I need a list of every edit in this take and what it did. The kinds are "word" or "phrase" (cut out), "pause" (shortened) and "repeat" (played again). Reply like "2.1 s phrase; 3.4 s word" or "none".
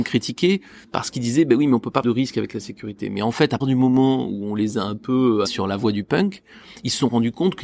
2.0 s word; 3.6 s word; 5.5 s word